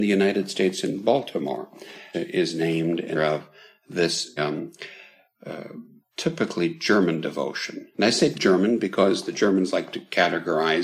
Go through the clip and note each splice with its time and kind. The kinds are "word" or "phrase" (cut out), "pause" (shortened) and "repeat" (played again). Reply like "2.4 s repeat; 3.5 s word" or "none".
2.1 s word; 3.1 s word; 4.4 s word; 6.0 s pause; 7.9 s pause; 8.3 s word